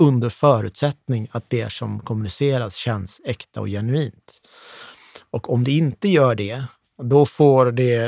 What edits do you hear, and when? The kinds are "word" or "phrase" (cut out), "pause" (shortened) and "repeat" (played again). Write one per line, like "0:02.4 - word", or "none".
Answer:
none